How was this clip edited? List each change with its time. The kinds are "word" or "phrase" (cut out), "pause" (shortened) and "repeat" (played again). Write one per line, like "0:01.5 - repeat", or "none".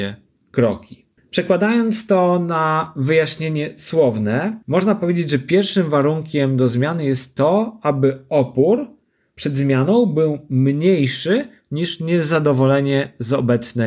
0:01.2 - pause
0:04.6 - pause